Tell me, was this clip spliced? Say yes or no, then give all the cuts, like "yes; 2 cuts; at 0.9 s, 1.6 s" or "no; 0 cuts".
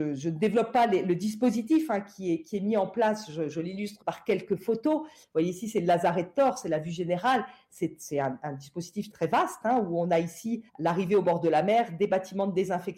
yes; 3 cuts; at 4.0 s, 9.1 s, 10.7 s